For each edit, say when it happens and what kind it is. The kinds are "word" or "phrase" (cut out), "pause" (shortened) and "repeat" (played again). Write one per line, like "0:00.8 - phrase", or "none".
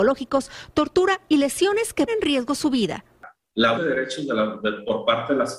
0:02.1 - word
0:03.7 - word